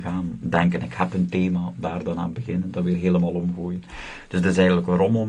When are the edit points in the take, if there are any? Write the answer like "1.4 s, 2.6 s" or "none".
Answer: none

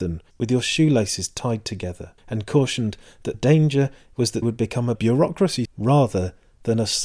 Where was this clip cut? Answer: 2.2 s, 3.3 s, 4.4 s, 5.7 s

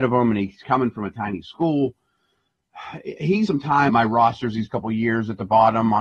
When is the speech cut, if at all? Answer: 1.1 s, 3.5 s, 3.9 s, 4.7 s

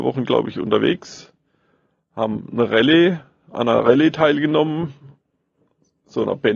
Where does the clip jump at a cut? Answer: none

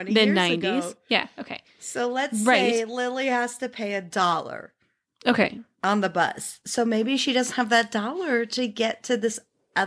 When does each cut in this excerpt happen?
none

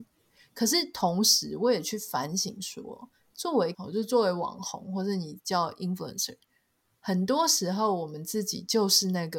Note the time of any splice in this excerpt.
3.7 s

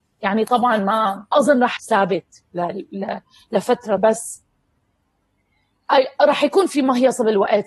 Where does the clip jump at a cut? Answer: 1.3 s, 1.8 s, 4.0 s

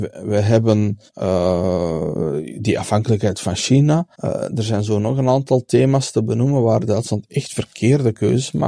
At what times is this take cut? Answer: 1.1 s, 4.1 s

